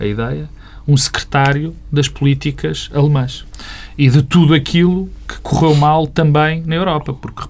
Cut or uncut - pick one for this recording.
uncut